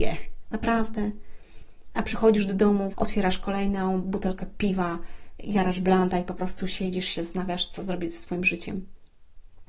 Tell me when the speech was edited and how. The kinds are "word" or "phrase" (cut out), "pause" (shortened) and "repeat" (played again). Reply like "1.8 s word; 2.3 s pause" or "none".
2.9 s word